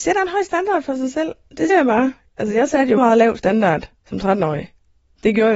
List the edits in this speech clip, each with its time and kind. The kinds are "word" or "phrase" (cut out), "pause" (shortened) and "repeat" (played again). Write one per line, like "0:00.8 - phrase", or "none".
0:01.7 - word
0:03.0 - word
0:04.0 - pause